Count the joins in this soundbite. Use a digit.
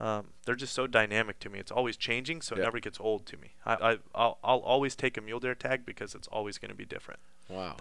1